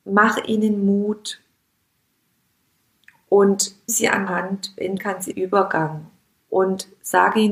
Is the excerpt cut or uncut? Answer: cut